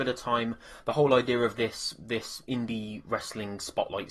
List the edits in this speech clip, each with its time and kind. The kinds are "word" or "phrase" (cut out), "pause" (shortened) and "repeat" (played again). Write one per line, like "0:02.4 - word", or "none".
none